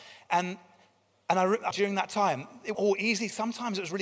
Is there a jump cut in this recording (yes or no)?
yes